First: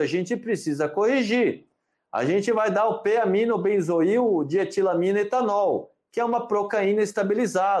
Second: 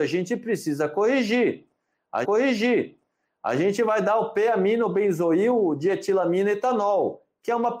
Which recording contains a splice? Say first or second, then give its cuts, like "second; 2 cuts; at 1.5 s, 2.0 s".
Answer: second; 1 cut; at 2.2 s